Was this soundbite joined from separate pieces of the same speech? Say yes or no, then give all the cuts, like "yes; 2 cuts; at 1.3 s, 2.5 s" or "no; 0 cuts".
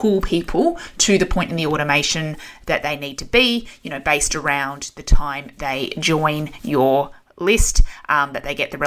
no; 0 cuts